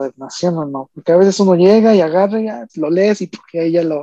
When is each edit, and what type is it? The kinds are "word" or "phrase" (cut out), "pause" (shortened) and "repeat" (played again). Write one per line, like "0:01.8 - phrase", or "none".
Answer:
0:02.7 - pause